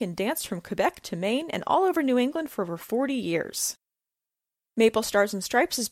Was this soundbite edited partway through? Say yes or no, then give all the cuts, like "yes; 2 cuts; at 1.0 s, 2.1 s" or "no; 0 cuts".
no; 0 cuts